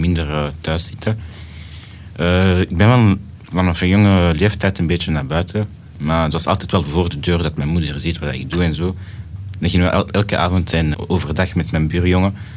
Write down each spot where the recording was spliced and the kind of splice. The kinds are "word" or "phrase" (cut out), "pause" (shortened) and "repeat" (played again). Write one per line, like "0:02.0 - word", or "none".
0:10.9 - word

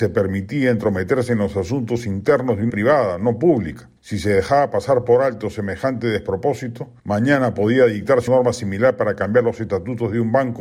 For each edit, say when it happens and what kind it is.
0:02.7 - word
0:04.0 - pause
0:07.0 - pause
0:08.3 - word

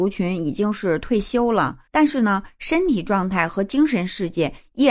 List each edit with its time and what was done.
0:01.9 - pause

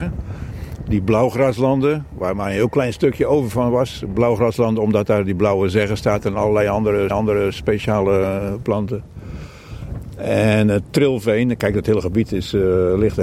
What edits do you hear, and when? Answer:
0:07.1 - repeat

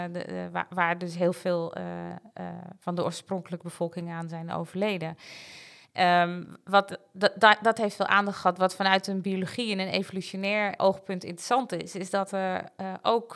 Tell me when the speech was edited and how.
0:10.8 - word

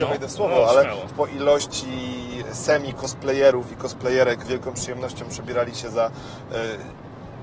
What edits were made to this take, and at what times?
0:01.1 - word
0:04.4 - word

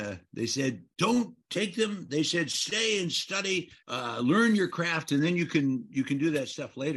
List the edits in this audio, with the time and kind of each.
0:00.9 - pause
0:03.8 - pause

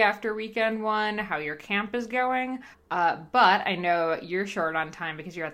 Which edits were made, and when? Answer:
0:02.7 - pause

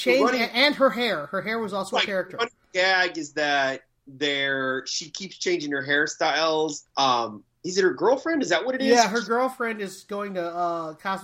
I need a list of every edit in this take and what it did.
0:06.9 - pause

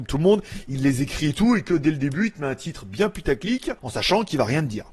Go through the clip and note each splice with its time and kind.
0:03.8 - pause

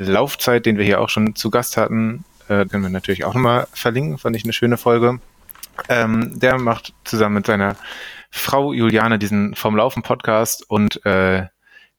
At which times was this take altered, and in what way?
0:02.7 - word

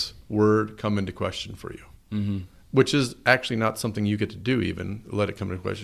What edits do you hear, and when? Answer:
none

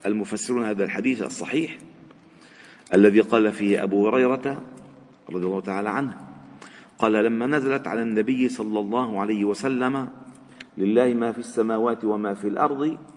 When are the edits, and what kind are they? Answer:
none

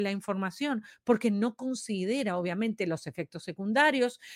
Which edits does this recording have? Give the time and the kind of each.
none

